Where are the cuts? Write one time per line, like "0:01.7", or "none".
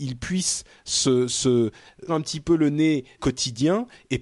0:02.1
0:03.2